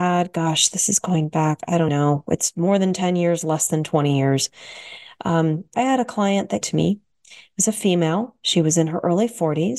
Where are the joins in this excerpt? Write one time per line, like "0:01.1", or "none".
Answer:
0:01.9
0:05.7
0:06.6